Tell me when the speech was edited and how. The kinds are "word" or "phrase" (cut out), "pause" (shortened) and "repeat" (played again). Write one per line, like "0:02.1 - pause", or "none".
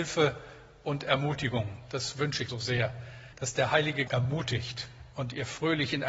0:02.5 - word
0:03.3 - pause
0:04.1 - phrase